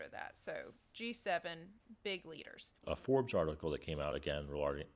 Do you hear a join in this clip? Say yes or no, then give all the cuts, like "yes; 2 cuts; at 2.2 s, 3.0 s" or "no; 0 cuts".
yes; 1 cut; at 2.8 s